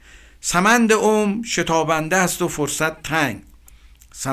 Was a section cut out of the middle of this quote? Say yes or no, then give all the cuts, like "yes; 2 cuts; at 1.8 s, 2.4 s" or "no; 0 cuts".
no; 0 cuts